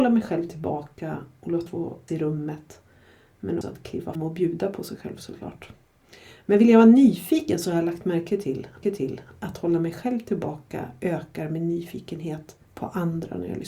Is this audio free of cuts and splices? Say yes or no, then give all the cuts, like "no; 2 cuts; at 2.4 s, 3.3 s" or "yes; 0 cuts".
no; 6 cuts; at 1.7 s, 2.1 s, 3.6 s, 4.1 s, 8.8 s, 12.6 s